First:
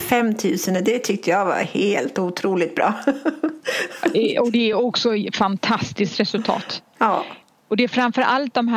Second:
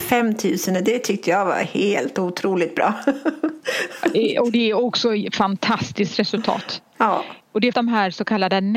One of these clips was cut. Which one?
second; 2 cuts; at 7.4 s, 7.7 s

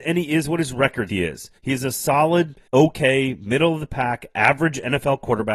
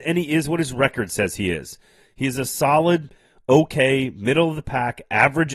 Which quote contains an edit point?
first; 3 cuts; at 1.1 s, 1.6 s, 2.7 s

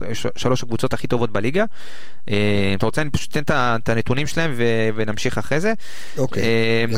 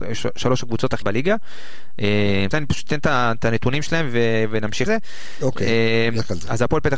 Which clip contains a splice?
second; 3 cuts; at 1.0 s, 2.5 s, 4.9 s

